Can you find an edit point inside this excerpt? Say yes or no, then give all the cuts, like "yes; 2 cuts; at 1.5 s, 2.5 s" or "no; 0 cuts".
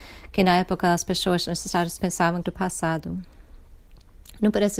yes; 2 cuts; at 2.0 s, 2.4 s